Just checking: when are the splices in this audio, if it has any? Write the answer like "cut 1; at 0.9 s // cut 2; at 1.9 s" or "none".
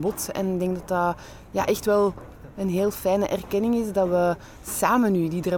none